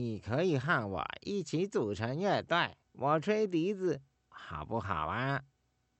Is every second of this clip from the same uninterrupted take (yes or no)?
no